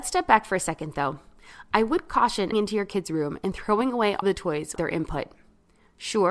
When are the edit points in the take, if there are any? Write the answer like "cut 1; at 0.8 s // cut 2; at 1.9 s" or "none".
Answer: cut 1; at 2.5 s // cut 2; at 4.2 s // cut 3; at 4.8 s